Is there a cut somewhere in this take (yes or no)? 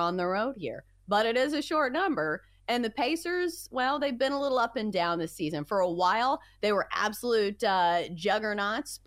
no